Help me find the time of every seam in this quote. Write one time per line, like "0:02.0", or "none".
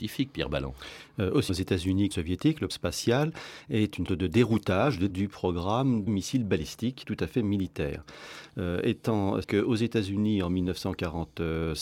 0:01.5
0:02.1
0:02.7
0:04.1
0:05.1
0:06.1
0:07.0
0:09.4